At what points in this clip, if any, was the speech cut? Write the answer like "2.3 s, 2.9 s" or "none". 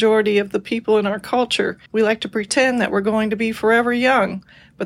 1.2 s, 1.9 s